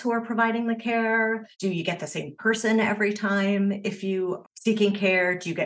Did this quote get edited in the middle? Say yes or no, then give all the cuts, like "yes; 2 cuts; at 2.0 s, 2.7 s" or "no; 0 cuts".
yes; 2 cuts; at 1.5 s, 4.4 s